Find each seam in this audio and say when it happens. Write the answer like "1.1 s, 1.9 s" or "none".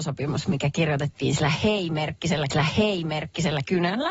2.5 s